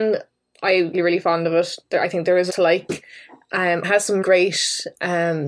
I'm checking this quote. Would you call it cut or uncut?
cut